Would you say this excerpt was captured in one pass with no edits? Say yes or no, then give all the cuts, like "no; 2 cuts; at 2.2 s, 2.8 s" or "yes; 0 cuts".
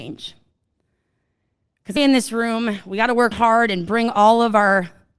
no; 2 cuts; at 2.0 s, 3.3 s